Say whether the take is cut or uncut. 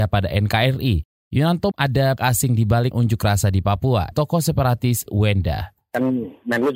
cut